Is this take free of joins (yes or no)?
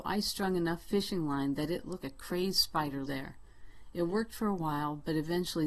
no